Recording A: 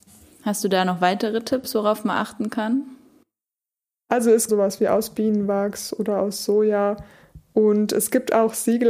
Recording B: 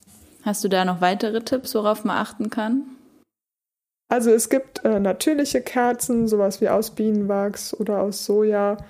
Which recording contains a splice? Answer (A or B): A